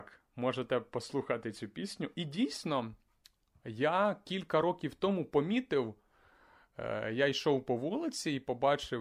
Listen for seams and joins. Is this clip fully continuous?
yes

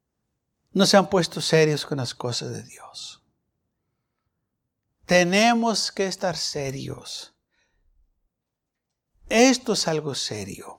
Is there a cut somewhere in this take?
no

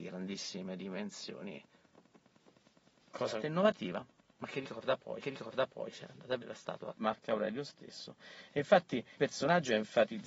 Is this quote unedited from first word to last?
no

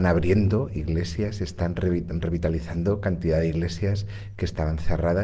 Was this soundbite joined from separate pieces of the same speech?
no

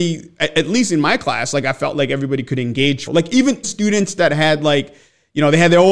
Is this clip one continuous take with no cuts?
no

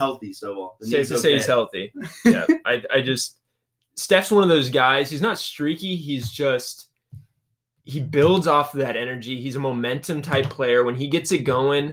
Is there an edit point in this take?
no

